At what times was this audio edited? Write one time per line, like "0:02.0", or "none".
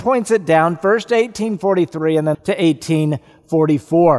0:02.3